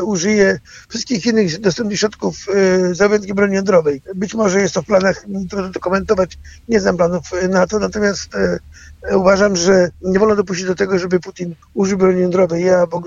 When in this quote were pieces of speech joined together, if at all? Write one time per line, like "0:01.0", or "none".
0:04.0
0:09.9
0:11.6